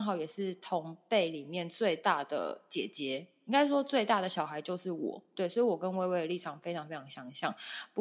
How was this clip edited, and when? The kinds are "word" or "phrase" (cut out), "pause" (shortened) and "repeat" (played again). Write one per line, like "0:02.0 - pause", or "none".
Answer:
none